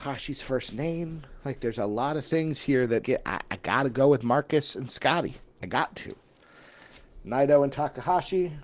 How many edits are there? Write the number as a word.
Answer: one